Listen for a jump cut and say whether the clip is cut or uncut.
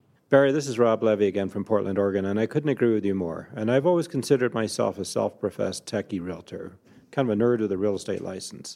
uncut